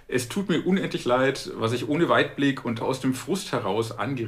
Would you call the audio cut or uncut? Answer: cut